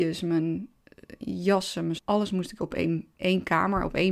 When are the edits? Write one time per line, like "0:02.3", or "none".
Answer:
0:02.0
0:03.2